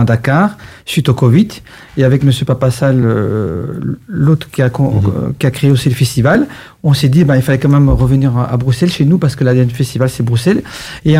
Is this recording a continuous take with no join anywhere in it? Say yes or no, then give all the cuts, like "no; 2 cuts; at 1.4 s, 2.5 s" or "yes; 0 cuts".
yes; 0 cuts